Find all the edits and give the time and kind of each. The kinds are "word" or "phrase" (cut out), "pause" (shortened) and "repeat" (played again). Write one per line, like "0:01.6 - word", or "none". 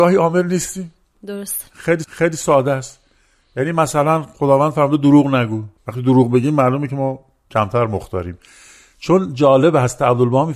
0:02.0 - repeat
0:05.8 - pause